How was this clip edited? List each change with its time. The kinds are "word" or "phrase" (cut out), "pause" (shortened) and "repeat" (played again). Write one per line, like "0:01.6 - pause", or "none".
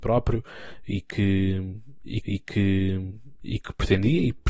0:02.2 - repeat